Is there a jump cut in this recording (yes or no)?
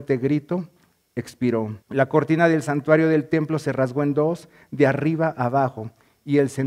yes